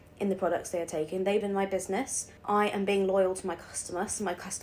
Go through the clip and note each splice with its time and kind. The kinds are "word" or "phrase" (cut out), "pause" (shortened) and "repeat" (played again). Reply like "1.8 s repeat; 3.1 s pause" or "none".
1.4 s word; 2.4 s pause